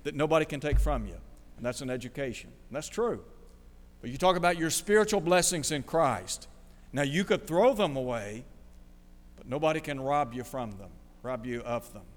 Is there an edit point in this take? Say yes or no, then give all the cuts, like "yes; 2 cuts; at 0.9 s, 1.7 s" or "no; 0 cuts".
no; 0 cuts